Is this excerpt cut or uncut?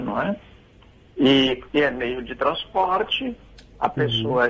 uncut